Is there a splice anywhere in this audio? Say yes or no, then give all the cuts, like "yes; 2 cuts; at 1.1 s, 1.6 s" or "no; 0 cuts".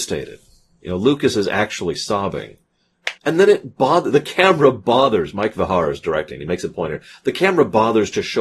yes; 1 cut; at 3.2 s